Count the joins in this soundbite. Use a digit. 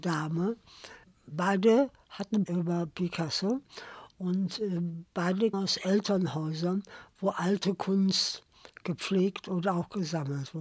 2